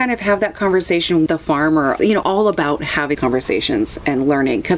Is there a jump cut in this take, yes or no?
yes